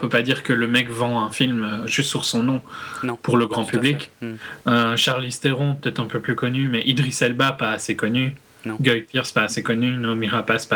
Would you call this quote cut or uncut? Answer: uncut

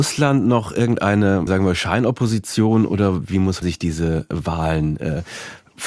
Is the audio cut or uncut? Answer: cut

